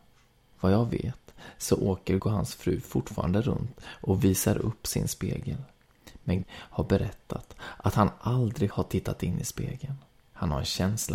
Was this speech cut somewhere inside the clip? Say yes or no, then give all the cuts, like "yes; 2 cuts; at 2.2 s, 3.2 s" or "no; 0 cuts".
yes; 3 cuts; at 2.2 s, 6.4 s, 8.7 s